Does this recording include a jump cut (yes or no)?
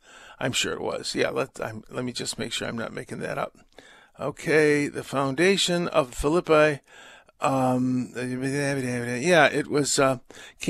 no